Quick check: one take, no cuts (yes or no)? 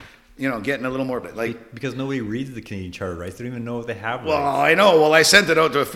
no